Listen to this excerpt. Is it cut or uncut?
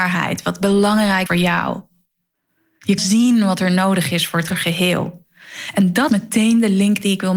cut